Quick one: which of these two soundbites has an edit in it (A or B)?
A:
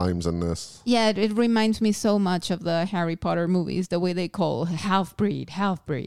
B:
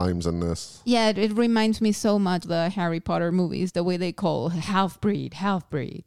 B